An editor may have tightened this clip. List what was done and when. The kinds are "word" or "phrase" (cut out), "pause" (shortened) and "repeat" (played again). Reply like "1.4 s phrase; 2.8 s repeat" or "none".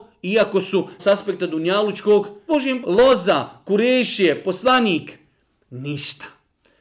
1.0 s word; 2.5 s word; 2.8 s word